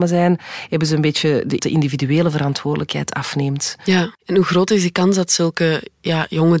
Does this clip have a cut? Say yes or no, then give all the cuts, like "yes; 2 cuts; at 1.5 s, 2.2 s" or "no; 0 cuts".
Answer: yes; 2 cuts; at 1.6 s, 4.1 s